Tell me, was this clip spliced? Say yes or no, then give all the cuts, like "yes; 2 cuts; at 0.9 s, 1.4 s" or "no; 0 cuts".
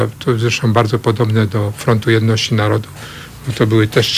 no; 0 cuts